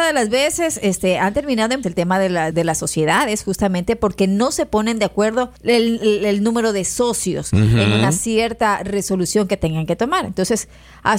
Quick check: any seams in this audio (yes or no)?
yes